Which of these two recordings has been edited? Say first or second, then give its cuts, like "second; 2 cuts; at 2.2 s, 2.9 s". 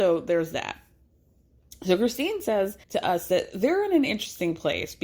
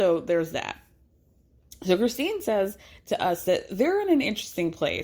first; 1 cut; at 2.8 s